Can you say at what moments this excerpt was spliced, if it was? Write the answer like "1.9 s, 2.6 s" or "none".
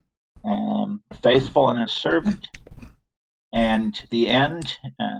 1.1 s, 1.9 s, 4.1 s